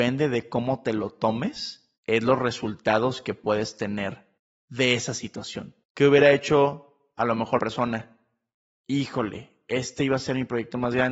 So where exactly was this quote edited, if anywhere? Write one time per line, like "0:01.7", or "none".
0:02.0
0:04.4
0:05.8
0:07.6